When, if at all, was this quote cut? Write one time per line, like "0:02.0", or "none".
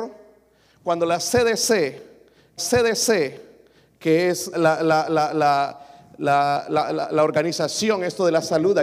0:02.6
0:04.5